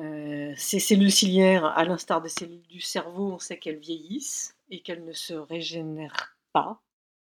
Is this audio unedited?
yes; 0 cuts

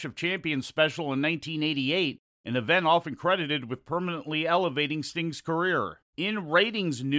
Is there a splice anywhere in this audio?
yes; 1 cut; at 6.1 s

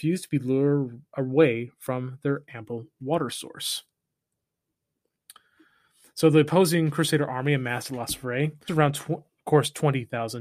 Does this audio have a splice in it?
yes; 1 cut; at 8.7 s

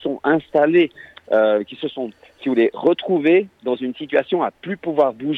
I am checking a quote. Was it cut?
no; 0 cuts

